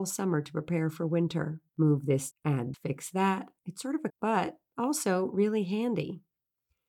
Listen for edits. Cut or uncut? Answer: cut